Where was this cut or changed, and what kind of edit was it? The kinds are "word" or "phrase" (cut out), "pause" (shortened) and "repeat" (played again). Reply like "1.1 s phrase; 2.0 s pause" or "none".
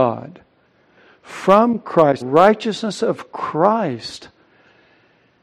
2.2 s word